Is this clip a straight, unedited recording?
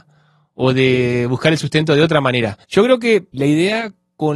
no; 2 cuts; at 2.6 s, 3.3 s

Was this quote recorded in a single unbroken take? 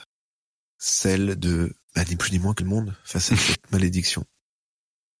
no; 2 cuts; at 1.8 s, 2.6 s

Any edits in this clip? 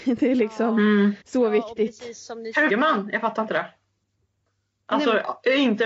yes; 2 cuts; at 1.2 s, 2.7 s

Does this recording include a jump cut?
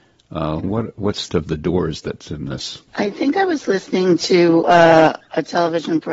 yes; 2 cuts; at 1.3 s, 2.9 s

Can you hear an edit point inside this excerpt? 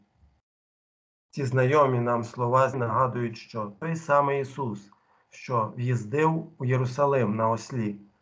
yes; 1 cut; at 2.7 s

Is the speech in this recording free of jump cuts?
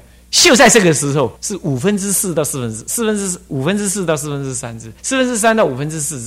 no; 2 cuts; at 1.4 s, 5.0 s

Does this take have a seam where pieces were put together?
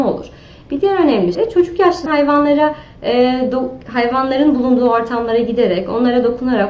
yes; 2 cuts; at 1.3 s, 2.1 s

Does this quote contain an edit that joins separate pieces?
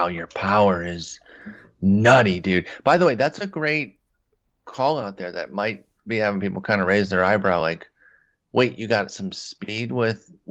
no; 0 cuts

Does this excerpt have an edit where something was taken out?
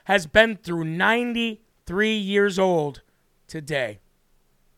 no; 0 cuts

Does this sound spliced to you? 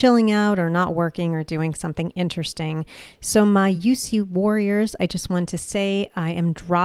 no; 0 cuts

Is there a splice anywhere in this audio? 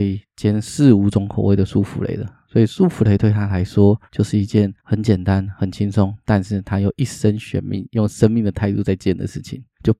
yes; 2 cuts; at 4.1 s, 4.8 s

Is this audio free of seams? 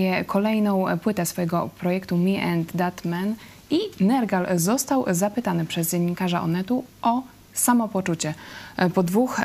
no; 1 cut; at 6.9 s

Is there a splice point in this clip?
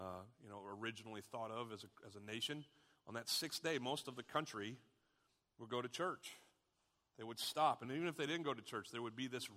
no; 0 cuts

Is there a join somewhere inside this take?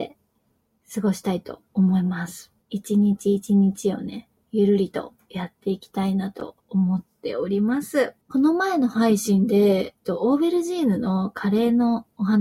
yes; 3 cuts; at 2.6 s, 6.6 s, 8.2 s

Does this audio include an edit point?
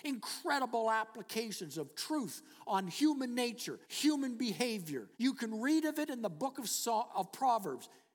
yes; 2 cuts; at 3.8 s, 5.1 s

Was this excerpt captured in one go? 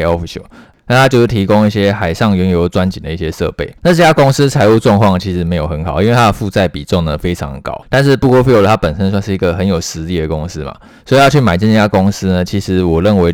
no; 2 cuts; at 3.8 s, 7.8 s

